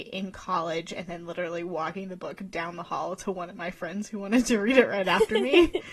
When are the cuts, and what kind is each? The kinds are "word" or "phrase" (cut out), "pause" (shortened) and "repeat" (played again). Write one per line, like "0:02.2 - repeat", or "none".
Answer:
none